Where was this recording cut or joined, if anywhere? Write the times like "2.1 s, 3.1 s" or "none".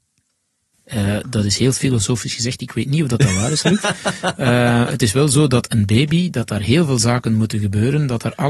none